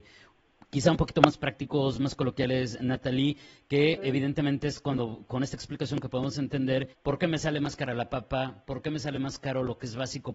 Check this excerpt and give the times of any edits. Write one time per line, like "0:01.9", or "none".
0:06.9